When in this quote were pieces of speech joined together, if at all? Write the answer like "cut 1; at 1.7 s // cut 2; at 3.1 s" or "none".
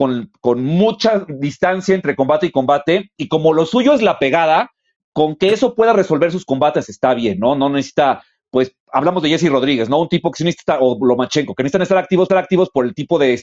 cut 1; at 12.3 s